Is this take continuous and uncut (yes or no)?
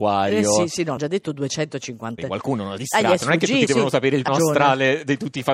no